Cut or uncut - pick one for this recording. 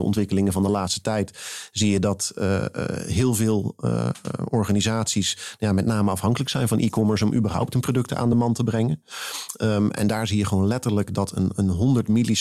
uncut